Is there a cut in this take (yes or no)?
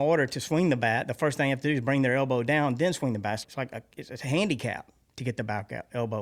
yes